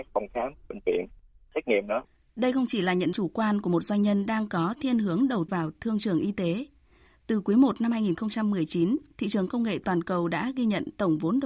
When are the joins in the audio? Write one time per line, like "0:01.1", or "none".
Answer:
0:03.1
0:05.5